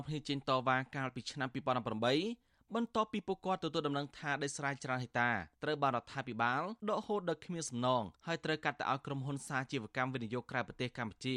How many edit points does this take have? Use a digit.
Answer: 3